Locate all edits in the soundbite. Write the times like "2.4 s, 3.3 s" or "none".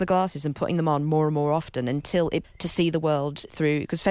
2.4 s